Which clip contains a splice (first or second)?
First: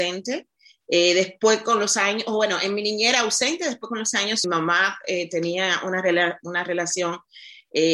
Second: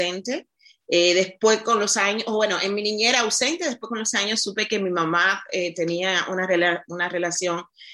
first